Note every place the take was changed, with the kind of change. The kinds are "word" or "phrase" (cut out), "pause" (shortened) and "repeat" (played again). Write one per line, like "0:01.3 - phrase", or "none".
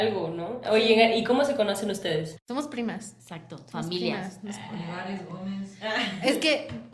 0:03.2 - pause